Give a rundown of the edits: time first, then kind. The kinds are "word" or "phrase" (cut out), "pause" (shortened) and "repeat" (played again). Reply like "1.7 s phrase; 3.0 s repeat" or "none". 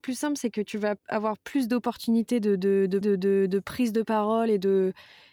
1.0 s pause; 3.0 s repeat